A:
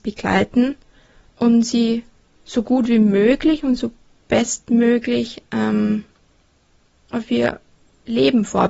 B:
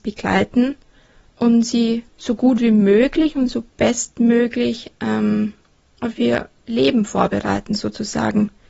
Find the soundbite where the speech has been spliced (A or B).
B